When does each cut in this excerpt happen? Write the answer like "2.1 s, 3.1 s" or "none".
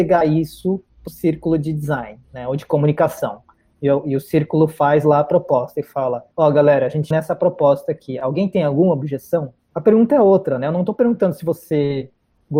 1.1 s, 2.2 s, 6.3 s, 7.1 s